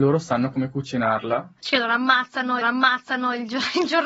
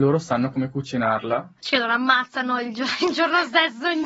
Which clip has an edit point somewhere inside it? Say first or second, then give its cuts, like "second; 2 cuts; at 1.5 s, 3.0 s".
first; 1 cut; at 2.6 s